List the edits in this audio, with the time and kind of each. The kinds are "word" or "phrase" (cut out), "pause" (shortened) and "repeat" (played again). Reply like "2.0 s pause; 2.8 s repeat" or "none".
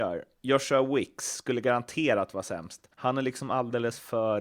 2.9 s pause